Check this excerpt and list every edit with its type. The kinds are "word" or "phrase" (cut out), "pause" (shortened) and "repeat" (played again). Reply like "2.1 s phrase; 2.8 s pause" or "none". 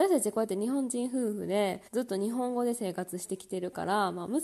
1.9 s pause